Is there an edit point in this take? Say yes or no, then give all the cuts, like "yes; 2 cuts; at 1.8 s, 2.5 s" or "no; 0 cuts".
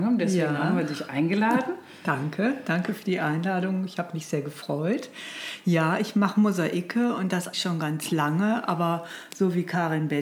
yes; 1 cut; at 7.5 s